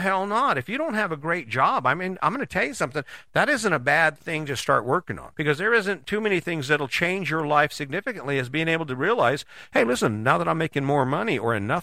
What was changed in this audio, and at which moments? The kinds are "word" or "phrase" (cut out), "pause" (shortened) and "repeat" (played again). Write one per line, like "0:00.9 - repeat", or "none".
0:05.3 - pause